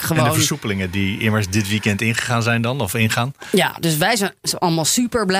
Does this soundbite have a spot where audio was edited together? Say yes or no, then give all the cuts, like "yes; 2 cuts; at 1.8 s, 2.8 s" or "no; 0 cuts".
no; 0 cuts